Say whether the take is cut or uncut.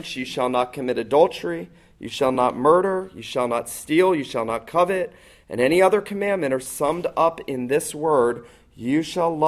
uncut